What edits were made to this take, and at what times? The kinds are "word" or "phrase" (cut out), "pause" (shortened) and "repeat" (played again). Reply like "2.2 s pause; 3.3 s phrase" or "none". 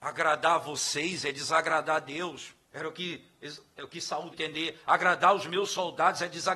2.6 s pause; 4.3 s word